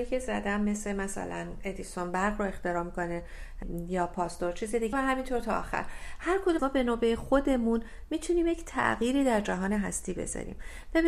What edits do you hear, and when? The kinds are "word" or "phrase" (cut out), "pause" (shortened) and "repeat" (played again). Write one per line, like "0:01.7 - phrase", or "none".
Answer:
0:04.9 - word
0:06.6 - word